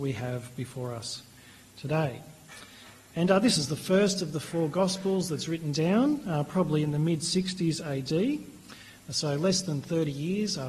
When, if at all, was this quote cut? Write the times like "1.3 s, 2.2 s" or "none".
none